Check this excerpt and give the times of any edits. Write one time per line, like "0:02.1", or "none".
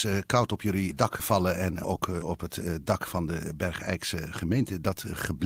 none